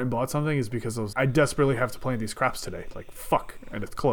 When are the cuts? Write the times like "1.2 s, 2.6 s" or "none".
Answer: 1.1 s